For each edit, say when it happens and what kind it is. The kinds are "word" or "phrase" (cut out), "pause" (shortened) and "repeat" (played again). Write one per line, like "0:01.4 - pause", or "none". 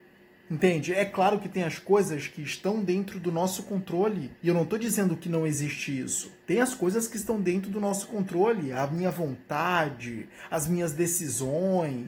0:04.4 - pause
0:06.4 - pause

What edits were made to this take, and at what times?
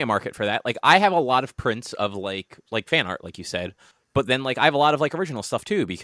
none

